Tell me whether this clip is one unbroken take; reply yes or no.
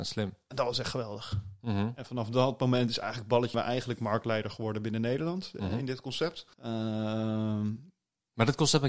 no